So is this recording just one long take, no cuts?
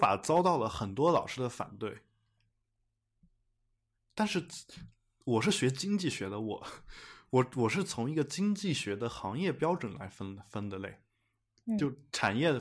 yes; 0 cuts

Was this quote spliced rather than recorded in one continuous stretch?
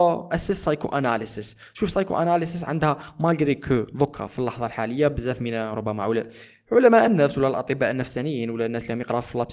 no; 0 cuts

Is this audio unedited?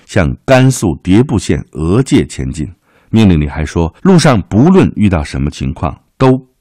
no; 2 cuts; at 2.8 s, 4.0 s

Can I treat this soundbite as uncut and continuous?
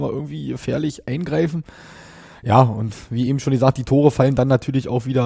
yes; 0 cuts

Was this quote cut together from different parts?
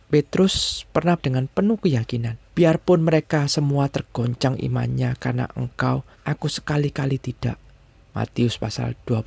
yes; 3 cuts; at 1.2 s, 2.5 s, 6.1 s

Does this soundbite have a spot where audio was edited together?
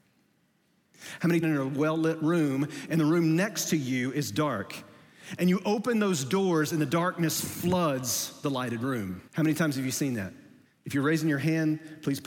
yes; 3 cuts; at 1.4 s, 9.3 s, 10.7 s

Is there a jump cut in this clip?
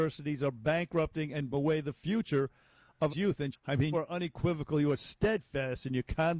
yes; 4 cuts; at 1.5 s, 3.1 s, 3.5 s, 3.9 s

